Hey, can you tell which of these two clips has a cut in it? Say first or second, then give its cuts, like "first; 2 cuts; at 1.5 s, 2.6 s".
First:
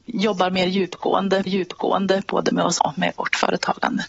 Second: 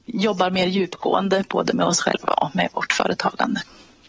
first; 2 cuts; at 1.5 s, 2.8 s